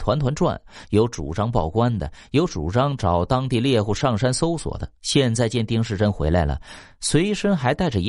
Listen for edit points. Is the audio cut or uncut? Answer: cut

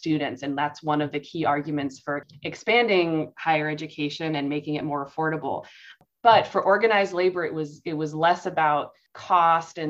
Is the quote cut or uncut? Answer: uncut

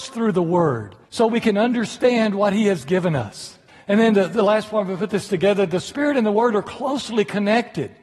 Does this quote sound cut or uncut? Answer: cut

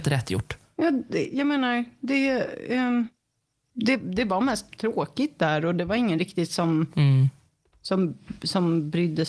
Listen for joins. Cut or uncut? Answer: cut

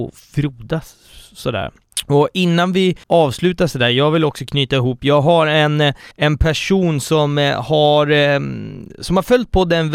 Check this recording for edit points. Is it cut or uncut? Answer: cut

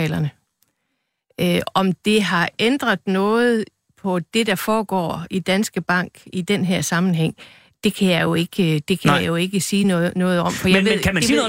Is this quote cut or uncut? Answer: uncut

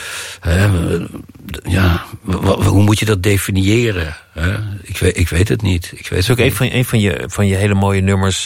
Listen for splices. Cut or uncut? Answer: uncut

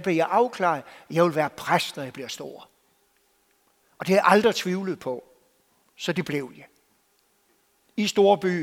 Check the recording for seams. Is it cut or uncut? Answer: uncut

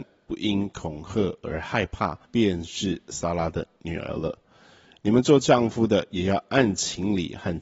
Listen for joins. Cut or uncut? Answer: cut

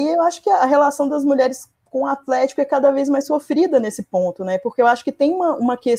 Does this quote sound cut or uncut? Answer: cut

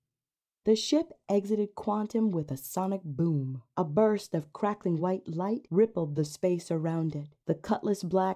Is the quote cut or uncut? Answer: uncut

